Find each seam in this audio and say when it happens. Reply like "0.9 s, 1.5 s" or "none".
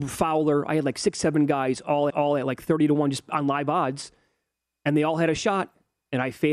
2.1 s